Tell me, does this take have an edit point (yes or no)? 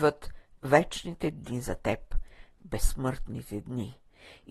no